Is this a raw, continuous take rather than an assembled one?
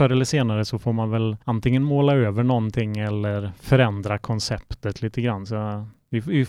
no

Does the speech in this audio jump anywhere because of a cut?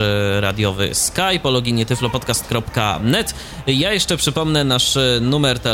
no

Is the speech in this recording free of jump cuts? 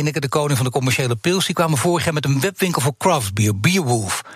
yes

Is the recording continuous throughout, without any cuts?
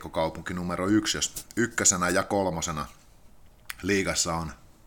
yes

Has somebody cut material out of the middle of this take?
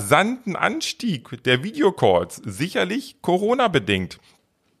no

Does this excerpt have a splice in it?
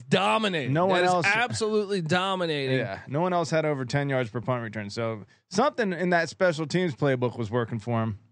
no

